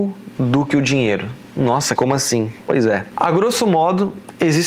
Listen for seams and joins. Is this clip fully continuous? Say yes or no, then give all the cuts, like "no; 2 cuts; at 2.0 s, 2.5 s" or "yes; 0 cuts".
no; 1 cut; at 2.0 s